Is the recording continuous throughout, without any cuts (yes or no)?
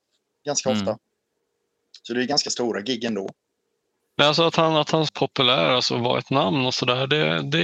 no